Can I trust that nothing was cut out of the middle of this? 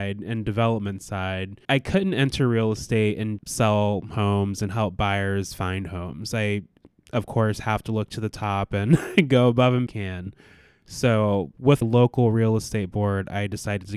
no; 4 cuts; at 1.6 s, 3.4 s, 9.9 s, 11.8 s

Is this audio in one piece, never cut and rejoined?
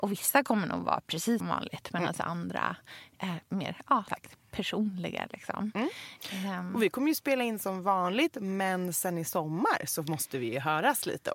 no; 2 cuts; at 1.4 s, 4.1 s

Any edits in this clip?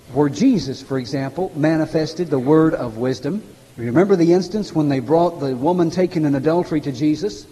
yes; 1 cut; at 3.5 s

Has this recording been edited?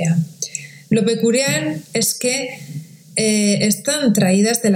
no; 0 cuts

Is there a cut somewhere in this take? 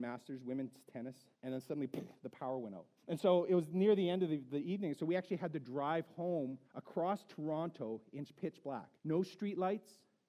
yes; 4 cuts; at 1.3 s, 3.0 s, 6.6 s, 9.0 s

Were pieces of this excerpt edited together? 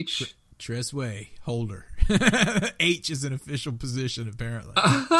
no; 0 cuts

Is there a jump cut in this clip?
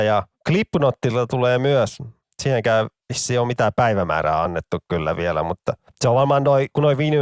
no; 0 cuts

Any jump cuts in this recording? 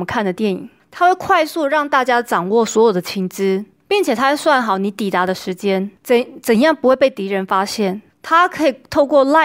no; 0 cuts

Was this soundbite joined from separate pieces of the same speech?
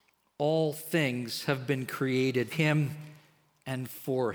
yes; 1 cut; at 2.5 s

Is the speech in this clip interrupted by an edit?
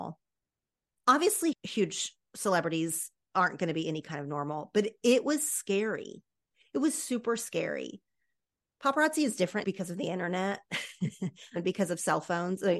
yes; 2 cuts; at 1.5 s, 9.6 s

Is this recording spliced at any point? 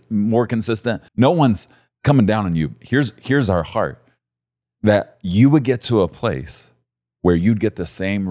yes; 1 cut; at 1.1 s

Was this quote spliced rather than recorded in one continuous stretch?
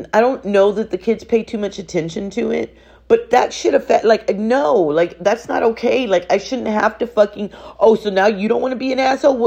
no; 0 cuts

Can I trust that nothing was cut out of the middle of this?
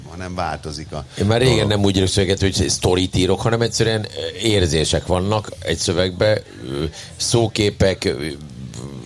yes; 0 cuts

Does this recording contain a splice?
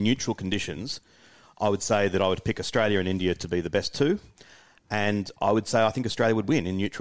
no; 0 cuts

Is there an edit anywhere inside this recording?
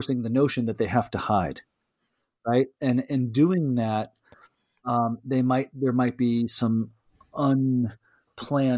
no; 0 cuts

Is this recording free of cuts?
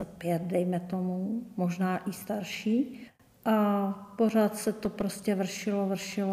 yes; 0 cuts

